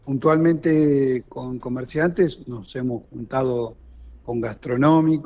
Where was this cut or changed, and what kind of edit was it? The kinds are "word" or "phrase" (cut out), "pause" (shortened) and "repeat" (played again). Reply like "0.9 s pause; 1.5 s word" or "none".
none